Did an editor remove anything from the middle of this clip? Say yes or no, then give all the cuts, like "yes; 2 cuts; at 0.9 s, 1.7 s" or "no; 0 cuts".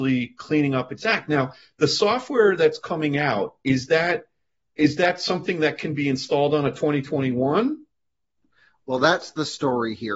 no; 0 cuts